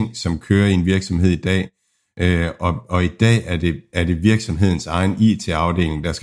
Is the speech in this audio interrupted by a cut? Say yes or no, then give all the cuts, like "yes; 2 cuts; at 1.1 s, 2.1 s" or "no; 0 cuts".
no; 0 cuts